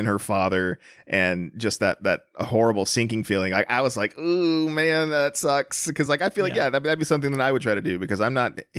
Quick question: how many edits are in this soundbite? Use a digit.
0